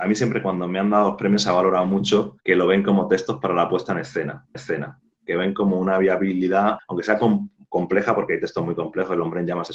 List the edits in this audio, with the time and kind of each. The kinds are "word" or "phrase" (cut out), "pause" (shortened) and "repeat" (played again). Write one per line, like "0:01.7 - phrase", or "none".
0:02.4 - pause
0:04.5 - repeat
0:06.8 - word